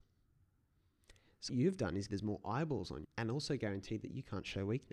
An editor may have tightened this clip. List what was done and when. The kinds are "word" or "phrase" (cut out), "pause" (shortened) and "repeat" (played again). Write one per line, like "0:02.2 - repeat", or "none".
0:01.5 - word
0:02.1 - word
0:03.0 - word